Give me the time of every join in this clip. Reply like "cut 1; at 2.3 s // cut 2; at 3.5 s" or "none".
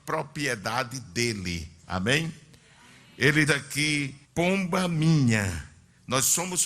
cut 1; at 3.5 s // cut 2; at 4.2 s